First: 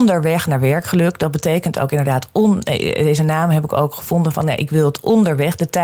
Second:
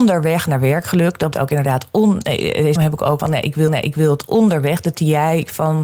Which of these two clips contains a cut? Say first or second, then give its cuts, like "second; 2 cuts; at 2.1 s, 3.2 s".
second; 5 cuts; at 1.3 s, 2.8 s, 3.2 s, 3.7 s, 4.9 s